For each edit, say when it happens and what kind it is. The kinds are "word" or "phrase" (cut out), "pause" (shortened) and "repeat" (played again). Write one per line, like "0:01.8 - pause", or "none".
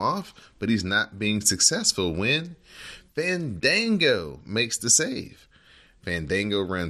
none